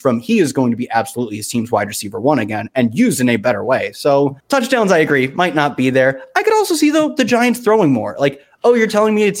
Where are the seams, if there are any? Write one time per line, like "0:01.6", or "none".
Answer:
0:04.4